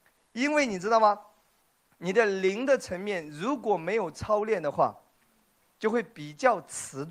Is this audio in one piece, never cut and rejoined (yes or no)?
yes